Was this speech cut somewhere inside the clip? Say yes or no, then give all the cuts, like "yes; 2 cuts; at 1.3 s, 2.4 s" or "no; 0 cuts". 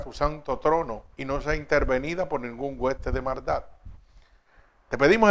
yes; 1 cut; at 1.1 s